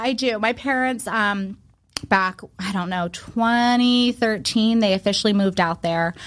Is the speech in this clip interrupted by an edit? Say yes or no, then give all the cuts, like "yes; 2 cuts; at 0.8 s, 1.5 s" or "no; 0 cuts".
no; 0 cuts